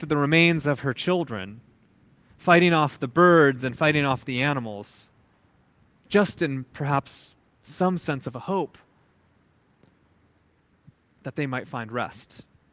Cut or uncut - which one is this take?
uncut